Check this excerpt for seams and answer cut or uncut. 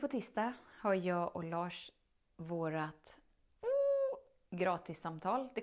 uncut